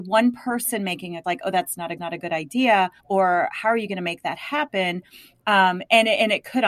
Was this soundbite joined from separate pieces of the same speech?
yes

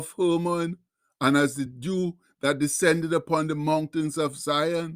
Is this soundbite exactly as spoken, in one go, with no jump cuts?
yes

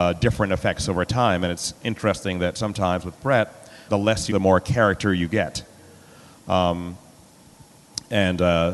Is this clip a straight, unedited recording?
no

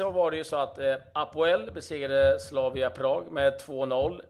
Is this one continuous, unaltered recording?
yes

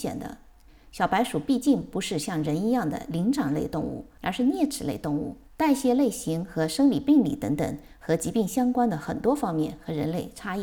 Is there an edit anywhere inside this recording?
yes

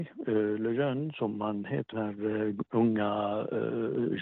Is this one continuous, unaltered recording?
no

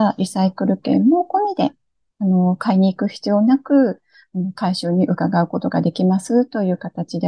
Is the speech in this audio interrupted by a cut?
no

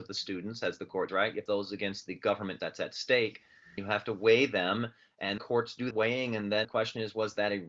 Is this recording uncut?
no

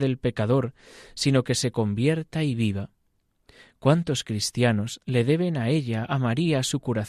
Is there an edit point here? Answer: no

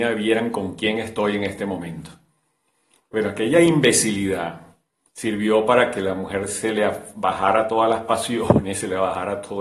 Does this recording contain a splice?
no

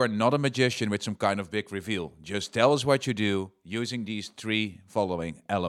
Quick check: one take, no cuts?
yes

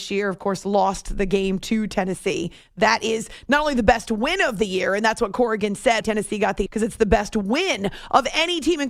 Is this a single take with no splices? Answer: no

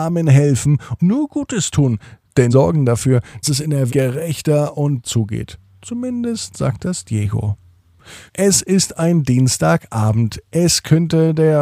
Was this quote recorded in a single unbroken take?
no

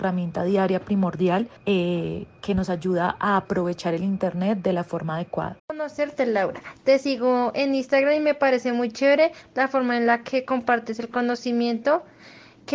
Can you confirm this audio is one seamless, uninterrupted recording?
no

